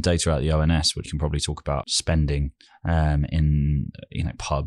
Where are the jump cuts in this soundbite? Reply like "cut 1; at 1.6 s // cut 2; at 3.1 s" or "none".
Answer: cut 1; at 1.0 s // cut 2; at 1.8 s // cut 3; at 2.7 s